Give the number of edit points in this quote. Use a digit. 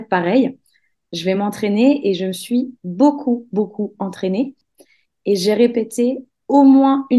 0